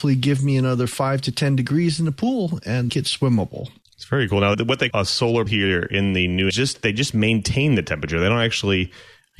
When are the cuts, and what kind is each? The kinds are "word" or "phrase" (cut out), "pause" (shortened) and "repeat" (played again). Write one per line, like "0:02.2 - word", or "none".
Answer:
0:02.9 - phrase
0:03.8 - pause
0:04.5 - word
0:04.9 - word
0:05.5 - word
0:06.5 - phrase